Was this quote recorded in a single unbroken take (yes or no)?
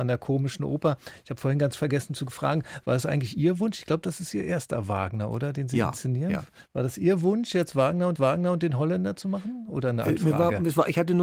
no